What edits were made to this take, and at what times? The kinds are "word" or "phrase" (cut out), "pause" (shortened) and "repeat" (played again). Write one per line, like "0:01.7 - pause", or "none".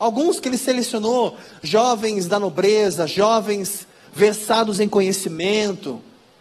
none